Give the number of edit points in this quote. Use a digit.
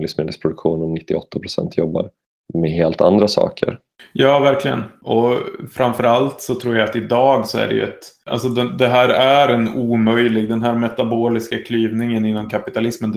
0